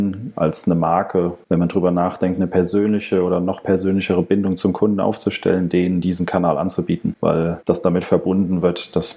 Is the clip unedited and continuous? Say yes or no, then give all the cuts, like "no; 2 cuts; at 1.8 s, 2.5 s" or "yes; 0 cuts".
yes; 0 cuts